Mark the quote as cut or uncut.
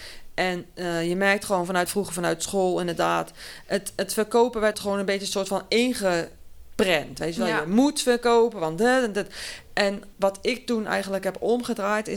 cut